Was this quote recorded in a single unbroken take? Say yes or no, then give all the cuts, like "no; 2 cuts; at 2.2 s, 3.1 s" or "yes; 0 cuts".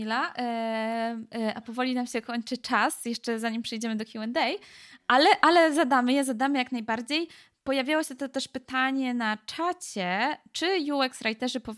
yes; 0 cuts